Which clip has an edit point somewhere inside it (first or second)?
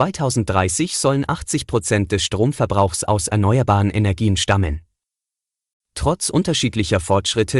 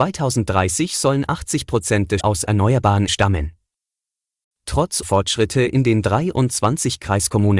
second